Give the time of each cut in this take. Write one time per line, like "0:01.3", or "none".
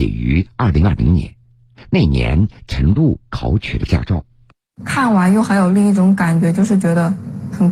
none